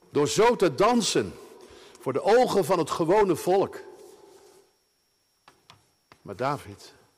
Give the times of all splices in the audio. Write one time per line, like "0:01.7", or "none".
none